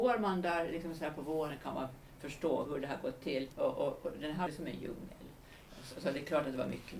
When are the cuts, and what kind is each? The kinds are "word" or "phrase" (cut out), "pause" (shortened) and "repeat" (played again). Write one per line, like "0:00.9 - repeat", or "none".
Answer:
0:02.7 - word
0:03.5 - pause
0:04.5 - phrase